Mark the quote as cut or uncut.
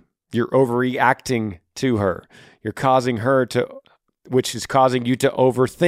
uncut